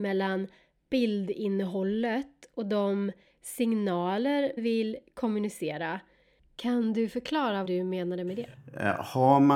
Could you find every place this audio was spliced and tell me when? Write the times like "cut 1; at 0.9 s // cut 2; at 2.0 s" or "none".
cut 1; at 4.6 s // cut 2; at 7.6 s